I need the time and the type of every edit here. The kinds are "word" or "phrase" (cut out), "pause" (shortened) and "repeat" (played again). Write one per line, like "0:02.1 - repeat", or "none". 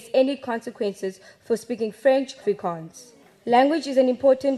0:02.4 - word